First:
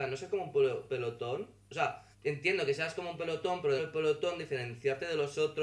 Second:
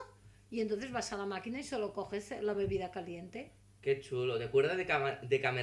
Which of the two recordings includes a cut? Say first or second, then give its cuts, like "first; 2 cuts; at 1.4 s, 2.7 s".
first; 2 cuts; at 2.1 s, 3.8 s